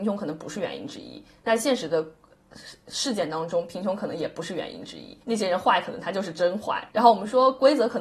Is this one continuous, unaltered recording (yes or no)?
no